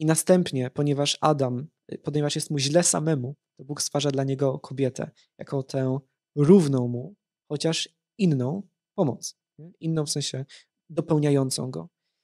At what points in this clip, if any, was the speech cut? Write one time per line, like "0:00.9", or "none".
none